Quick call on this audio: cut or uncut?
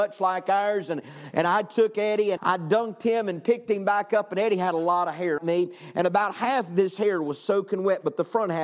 cut